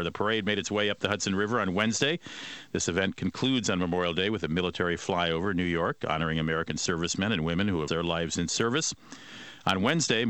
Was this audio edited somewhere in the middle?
yes; 1 cut; at 7.9 s

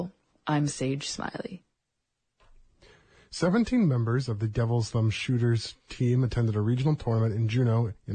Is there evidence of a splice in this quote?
no; 0 cuts

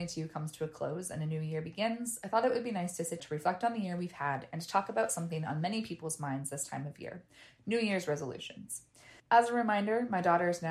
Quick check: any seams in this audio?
yes; 2 cuts; at 3.2 s, 9.2 s

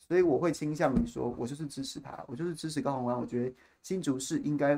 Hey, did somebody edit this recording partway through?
no; 0 cuts

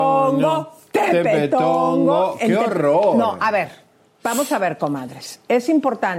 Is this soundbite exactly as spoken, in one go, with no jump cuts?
yes; 0 cuts

